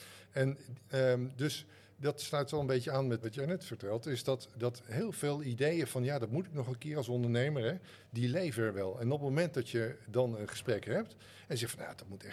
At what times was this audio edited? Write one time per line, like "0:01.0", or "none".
0:03.2